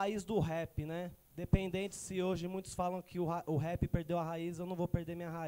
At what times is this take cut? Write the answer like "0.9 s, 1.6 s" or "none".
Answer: 1.2 s